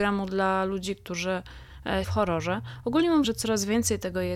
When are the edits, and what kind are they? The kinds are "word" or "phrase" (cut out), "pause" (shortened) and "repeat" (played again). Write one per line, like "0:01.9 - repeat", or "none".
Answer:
0:02.0 - word
0:03.2 - word